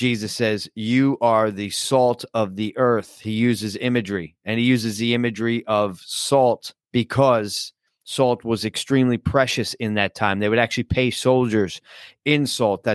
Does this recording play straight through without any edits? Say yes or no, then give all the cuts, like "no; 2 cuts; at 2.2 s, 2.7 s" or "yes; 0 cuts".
no; 1 cut; at 6.8 s